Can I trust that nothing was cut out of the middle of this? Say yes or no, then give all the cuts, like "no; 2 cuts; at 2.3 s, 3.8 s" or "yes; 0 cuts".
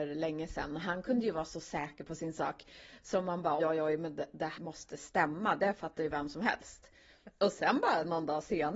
no; 2 cuts; at 3.6 s, 4.6 s